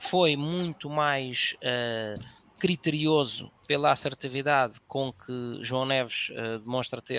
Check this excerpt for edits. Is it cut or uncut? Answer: cut